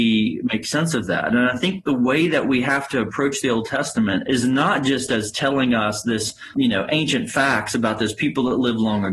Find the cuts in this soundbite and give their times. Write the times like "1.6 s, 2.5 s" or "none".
4.2 s, 6.5 s